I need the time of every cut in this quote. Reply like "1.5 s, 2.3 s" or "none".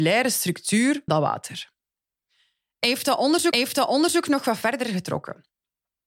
1.1 s, 3.5 s